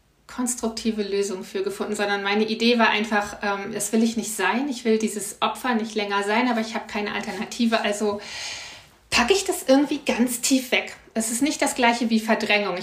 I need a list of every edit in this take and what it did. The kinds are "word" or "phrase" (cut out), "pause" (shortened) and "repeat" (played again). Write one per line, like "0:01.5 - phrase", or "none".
none